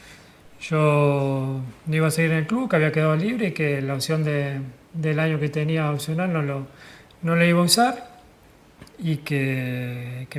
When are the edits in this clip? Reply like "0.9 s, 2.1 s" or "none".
none